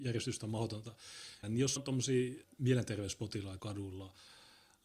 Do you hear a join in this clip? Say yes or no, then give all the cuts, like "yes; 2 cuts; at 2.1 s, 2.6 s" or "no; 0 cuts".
yes; 4 cuts; at 1.4 s, 1.8 s, 2.4 s, 3.6 s